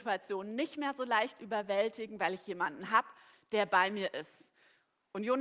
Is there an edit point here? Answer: no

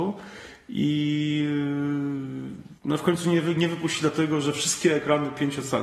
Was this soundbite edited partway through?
yes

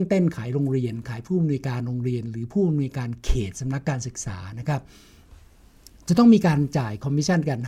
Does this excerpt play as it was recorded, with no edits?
yes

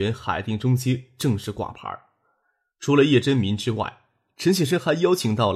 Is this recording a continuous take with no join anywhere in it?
yes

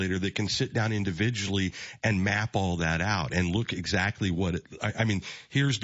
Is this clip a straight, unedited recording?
yes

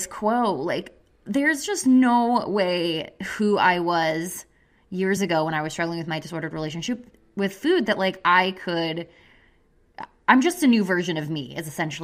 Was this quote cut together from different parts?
no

